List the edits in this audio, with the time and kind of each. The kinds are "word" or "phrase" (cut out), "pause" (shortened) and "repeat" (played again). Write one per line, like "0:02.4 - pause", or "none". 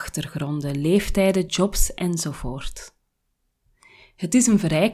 none